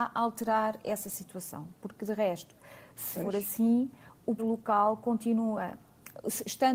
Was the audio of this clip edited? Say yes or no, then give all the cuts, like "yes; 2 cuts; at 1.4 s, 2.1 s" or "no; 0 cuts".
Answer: yes; 2 cuts; at 3.1 s, 4.4 s